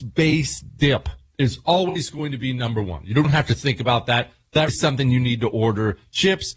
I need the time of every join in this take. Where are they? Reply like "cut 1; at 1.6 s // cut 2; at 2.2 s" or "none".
cut 1; at 3.2 s // cut 2; at 4.7 s